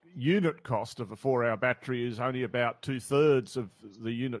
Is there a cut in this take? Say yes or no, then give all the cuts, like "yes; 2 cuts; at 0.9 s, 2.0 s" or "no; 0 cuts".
no; 0 cuts